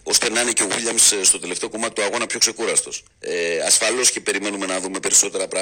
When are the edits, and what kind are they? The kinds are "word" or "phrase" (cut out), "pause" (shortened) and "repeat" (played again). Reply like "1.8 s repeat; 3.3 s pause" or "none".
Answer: 3.1 s pause